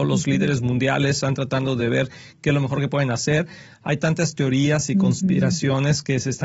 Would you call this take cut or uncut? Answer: uncut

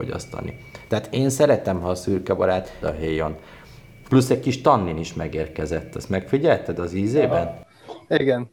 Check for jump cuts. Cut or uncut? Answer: cut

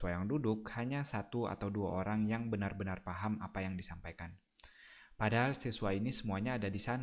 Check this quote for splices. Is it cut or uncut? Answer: uncut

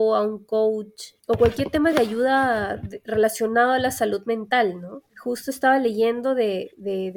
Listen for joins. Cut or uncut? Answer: uncut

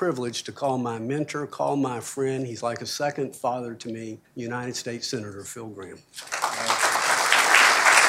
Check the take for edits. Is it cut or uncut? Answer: cut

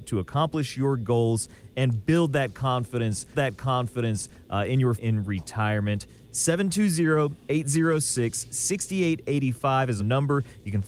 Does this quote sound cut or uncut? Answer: cut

